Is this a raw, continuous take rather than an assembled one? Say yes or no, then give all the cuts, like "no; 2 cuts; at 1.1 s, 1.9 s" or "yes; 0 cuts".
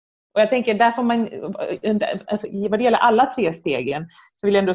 yes; 0 cuts